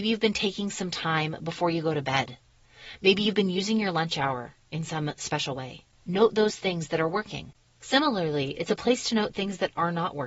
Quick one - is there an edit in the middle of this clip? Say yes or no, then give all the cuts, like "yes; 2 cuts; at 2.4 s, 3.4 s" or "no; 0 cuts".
no; 0 cuts